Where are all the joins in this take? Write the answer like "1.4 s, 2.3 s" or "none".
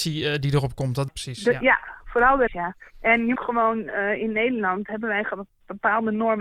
1.1 s, 2.5 s, 2.9 s, 3.3 s